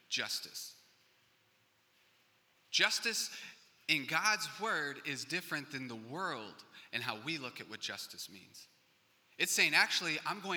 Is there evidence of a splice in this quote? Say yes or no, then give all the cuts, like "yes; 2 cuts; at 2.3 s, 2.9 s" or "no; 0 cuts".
no; 0 cuts